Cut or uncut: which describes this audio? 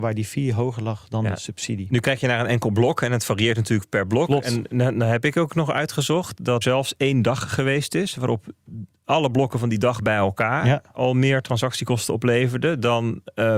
cut